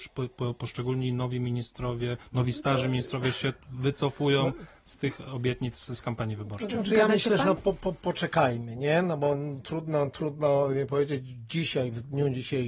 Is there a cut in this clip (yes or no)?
yes